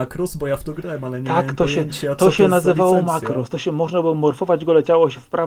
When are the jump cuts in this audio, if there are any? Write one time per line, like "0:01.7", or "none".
none